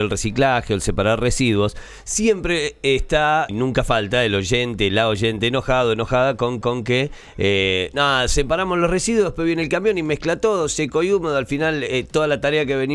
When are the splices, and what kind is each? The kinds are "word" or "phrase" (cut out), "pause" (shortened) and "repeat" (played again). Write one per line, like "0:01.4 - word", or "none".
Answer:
0:03.5 - word
0:06.6 - repeat